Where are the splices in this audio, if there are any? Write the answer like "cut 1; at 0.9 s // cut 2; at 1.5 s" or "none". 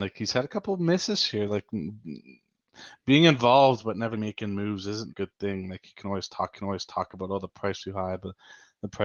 cut 1; at 4.1 s // cut 2; at 5.1 s // cut 3; at 6.5 s // cut 4; at 7.8 s